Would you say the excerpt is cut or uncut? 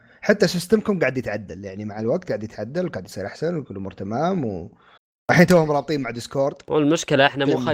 cut